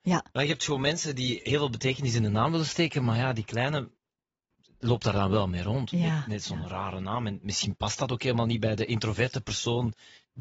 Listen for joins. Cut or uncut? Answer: uncut